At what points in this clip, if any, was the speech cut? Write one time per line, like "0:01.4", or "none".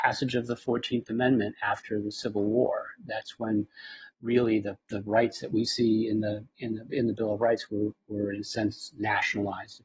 0:04.8